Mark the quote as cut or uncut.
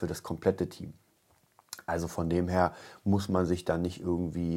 uncut